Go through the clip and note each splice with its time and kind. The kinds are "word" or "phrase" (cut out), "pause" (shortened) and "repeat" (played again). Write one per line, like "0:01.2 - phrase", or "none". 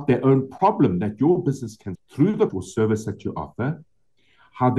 0:01.9 - word
0:02.5 - word